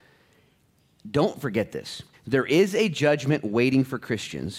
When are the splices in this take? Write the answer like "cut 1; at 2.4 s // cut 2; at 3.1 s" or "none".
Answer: cut 1; at 2.1 s